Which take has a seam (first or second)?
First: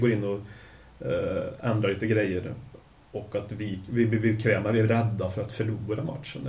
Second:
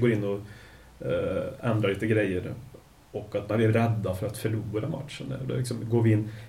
second